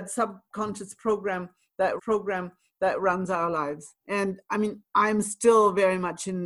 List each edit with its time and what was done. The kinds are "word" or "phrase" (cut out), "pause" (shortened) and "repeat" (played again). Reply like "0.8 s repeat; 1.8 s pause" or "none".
2.0 s repeat; 4.0 s pause